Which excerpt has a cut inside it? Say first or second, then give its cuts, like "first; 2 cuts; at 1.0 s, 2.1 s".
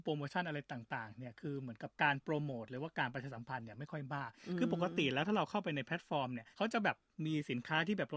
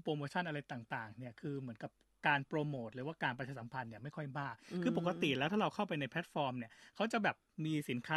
first; 2 cuts; at 1.9 s, 6.5 s